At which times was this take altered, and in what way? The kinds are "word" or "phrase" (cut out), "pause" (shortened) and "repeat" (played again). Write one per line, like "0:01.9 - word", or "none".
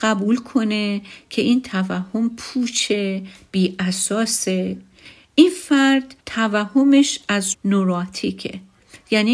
0:06.2 - pause
0:07.5 - word